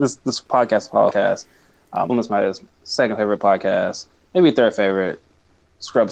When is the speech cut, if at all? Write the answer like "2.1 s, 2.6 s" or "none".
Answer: 1.1 s, 2.1 s